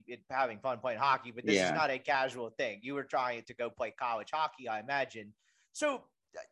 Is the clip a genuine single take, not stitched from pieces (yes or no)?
no